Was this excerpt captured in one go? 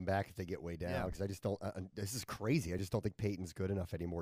yes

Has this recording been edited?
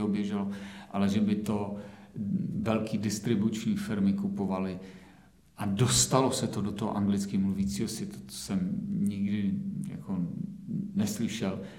no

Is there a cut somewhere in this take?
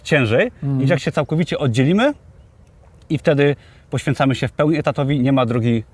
no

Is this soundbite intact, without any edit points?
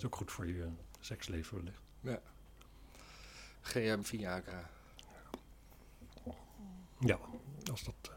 no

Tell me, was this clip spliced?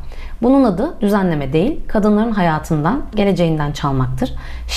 yes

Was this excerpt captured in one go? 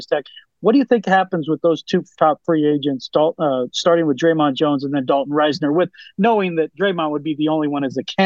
yes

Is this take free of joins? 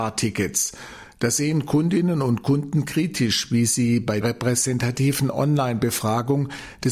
no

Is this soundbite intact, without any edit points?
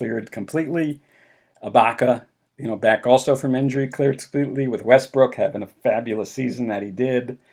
yes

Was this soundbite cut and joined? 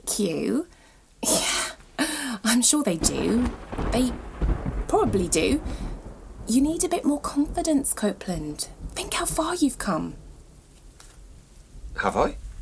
no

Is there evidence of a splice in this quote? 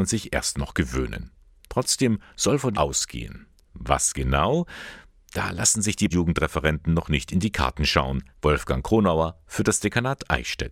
yes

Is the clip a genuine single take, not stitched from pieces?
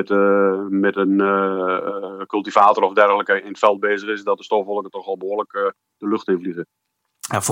yes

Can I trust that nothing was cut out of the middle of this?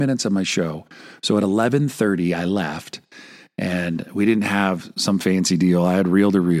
yes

